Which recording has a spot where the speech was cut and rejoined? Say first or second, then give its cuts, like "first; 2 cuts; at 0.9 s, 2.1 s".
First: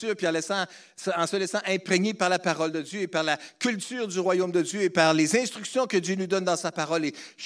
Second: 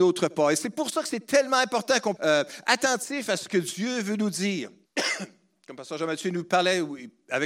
second; 2 cuts; at 2.2 s, 4.9 s